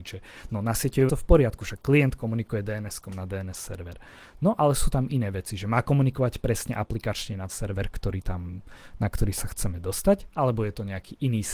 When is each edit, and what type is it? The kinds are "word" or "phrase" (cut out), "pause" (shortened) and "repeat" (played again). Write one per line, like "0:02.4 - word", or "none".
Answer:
0:01.1 - word
0:07.5 - word